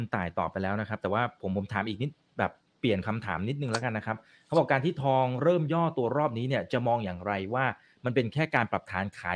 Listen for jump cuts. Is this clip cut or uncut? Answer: uncut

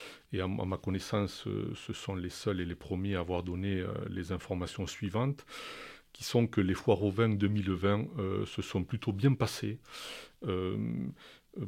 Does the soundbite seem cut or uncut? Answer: uncut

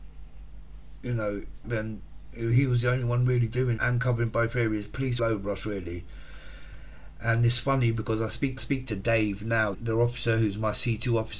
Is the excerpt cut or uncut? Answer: cut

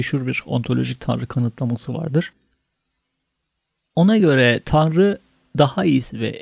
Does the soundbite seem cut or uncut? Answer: uncut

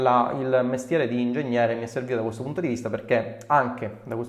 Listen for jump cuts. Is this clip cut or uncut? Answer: uncut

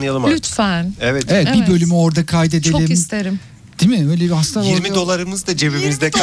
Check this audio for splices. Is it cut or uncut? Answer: uncut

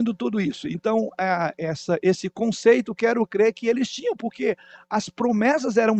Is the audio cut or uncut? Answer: uncut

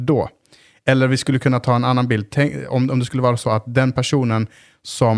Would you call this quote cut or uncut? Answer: uncut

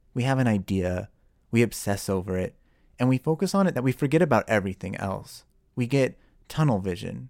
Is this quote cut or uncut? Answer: cut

